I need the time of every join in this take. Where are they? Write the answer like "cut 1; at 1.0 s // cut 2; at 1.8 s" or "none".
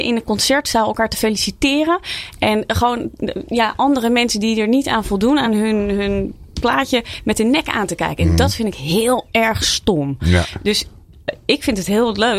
none

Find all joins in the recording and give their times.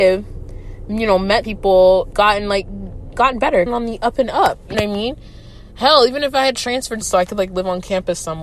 cut 1; at 1.4 s // cut 2; at 2.1 s // cut 3; at 3.7 s // cut 4; at 4.7 s // cut 5; at 7.0 s

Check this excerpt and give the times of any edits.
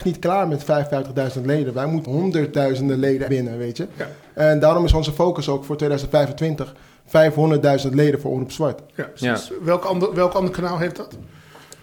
cut 1; at 2.0 s // cut 2; at 3.3 s

